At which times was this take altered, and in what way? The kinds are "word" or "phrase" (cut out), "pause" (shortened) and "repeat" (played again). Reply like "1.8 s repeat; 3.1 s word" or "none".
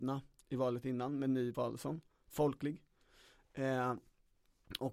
1.5 s phrase